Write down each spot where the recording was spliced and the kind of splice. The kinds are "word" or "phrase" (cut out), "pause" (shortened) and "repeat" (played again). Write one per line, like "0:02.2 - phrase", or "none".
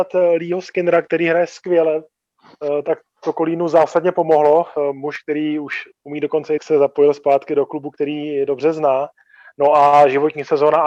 0:06.6 - phrase